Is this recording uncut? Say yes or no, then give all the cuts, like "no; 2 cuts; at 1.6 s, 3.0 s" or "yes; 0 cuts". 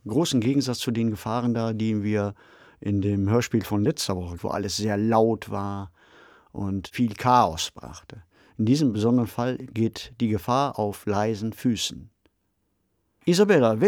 yes; 0 cuts